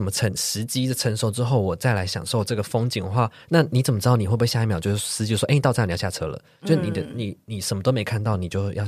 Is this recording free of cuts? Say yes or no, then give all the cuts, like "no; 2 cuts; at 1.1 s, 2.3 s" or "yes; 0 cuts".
yes; 0 cuts